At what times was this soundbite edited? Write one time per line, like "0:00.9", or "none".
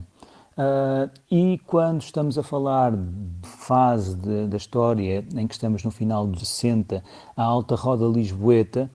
0:03.4
0:06.4